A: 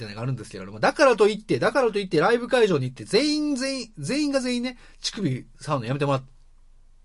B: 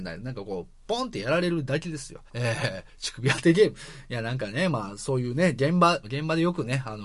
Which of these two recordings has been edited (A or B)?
B